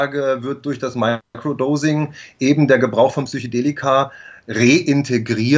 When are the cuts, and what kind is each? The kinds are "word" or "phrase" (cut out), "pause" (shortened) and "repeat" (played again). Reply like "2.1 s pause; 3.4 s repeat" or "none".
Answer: none